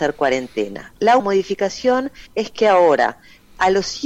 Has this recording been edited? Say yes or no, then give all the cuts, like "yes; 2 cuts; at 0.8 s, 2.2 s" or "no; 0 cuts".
yes; 2 cuts; at 1.2 s, 2.3 s